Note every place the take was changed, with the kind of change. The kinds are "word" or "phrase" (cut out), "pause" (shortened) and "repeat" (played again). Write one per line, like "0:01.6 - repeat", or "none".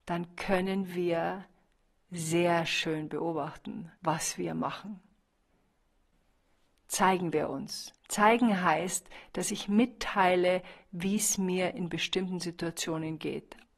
0:04.0 - pause
0:08.0 - pause